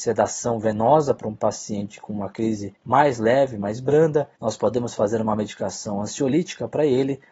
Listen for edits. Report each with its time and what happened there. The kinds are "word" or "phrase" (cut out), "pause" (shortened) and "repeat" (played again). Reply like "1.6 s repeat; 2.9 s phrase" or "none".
2.8 s pause; 4.4 s pause